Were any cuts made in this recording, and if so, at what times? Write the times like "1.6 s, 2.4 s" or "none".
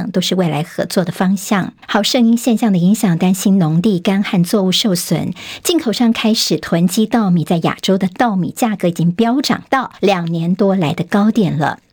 1.8 s, 10.0 s